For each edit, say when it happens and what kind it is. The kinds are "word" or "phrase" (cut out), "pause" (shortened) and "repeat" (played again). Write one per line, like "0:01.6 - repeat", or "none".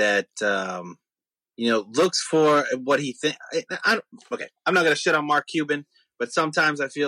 none